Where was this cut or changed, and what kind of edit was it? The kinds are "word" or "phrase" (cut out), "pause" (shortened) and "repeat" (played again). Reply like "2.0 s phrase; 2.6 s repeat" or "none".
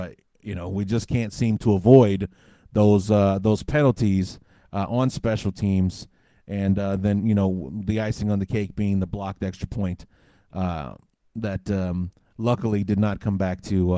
none